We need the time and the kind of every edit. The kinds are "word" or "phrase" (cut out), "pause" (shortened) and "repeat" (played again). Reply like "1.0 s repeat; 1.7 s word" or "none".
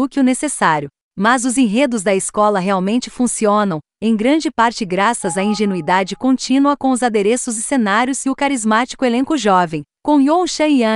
none